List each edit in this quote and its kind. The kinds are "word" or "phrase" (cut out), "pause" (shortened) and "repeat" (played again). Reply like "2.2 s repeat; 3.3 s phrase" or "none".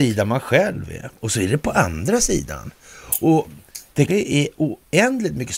1.2 s pause; 4.1 s word